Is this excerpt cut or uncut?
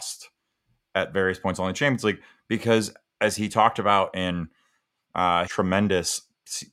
cut